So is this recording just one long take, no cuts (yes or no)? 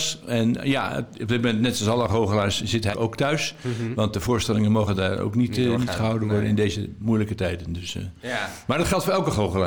no